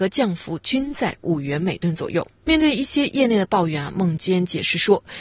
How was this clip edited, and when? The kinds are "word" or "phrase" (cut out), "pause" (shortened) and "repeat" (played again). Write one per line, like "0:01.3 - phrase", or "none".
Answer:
0:02.4 - pause